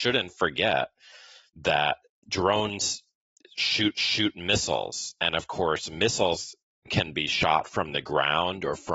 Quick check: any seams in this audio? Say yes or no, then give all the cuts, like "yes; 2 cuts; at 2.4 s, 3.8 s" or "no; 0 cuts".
yes; 1 cut; at 3.9 s